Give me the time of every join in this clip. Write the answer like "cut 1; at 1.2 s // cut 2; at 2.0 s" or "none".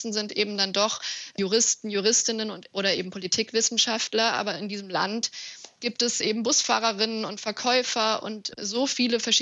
none